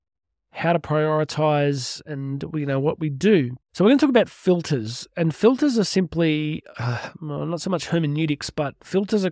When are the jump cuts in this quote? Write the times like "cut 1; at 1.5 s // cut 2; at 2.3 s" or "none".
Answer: cut 1; at 3.6 s